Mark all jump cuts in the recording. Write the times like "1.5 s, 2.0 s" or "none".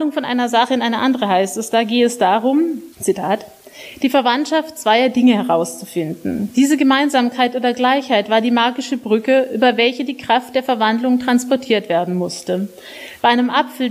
2.9 s